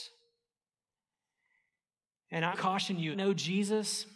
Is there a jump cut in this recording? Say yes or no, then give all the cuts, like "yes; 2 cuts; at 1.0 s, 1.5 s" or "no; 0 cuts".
yes; 2 cuts; at 2.5 s, 3.1 s